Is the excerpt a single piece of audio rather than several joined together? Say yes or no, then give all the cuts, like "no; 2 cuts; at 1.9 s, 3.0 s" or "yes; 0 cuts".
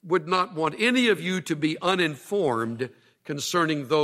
yes; 0 cuts